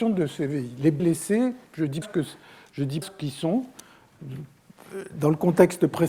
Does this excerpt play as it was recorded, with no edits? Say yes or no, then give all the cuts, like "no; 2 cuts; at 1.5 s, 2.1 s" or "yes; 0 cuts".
no; 3 cuts; at 1.0 s, 2.0 s, 3.0 s